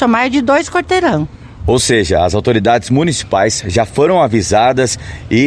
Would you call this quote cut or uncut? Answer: uncut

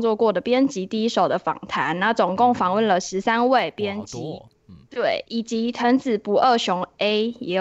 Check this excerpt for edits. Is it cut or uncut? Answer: uncut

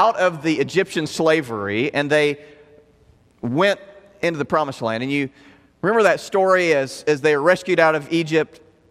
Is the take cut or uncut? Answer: uncut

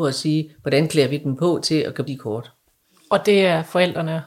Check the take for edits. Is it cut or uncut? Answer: cut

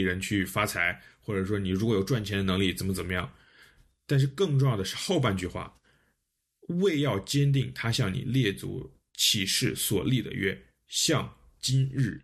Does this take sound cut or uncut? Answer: uncut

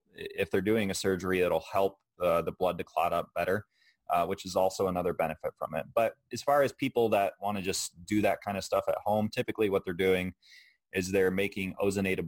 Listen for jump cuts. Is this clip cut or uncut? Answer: uncut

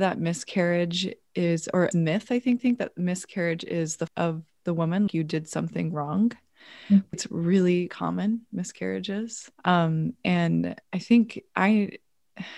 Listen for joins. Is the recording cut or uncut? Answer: cut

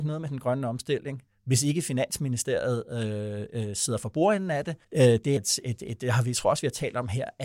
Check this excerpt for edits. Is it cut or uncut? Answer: cut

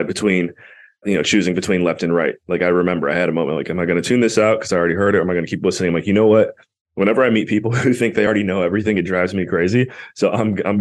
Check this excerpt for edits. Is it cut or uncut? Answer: uncut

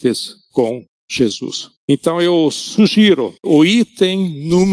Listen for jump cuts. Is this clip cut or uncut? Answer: cut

